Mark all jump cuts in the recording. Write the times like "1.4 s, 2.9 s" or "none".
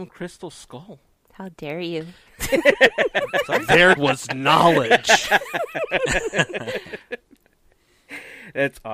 1.1 s, 4.0 s